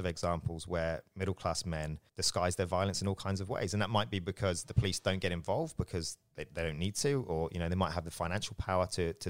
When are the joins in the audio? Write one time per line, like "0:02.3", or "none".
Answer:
0:02.1